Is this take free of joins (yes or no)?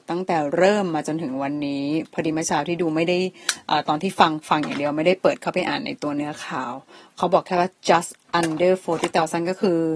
yes